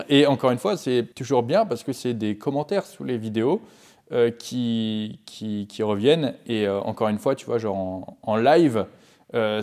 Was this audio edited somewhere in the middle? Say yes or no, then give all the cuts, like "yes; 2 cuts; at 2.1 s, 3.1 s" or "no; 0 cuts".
yes; 1 cut; at 1.1 s